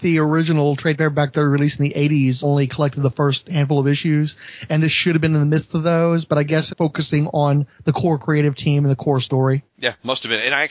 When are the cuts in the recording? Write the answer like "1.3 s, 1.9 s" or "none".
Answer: 2.4 s, 6.7 s